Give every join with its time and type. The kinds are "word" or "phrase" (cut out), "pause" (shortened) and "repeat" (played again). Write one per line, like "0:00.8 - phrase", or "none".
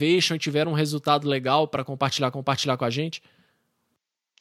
0:02.3 - repeat

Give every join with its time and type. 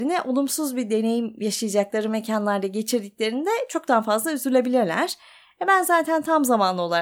none

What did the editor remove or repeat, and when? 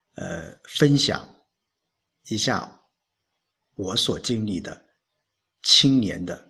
none

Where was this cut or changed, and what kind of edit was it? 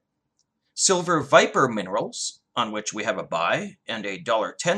none

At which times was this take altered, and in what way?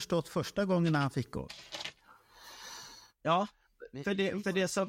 none

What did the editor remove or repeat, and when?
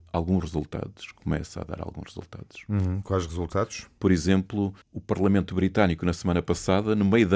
0:04.8 - pause

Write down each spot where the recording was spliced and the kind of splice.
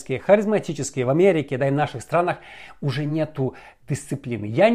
none

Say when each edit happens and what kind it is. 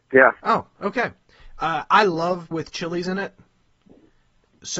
0:02.5 - word

